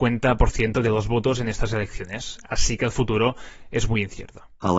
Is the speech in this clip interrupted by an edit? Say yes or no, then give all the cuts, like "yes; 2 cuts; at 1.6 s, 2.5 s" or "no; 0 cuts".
no; 0 cuts